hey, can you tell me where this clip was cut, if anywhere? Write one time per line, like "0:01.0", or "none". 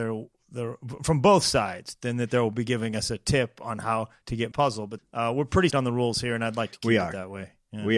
0:04.5
0:05.0
0:05.7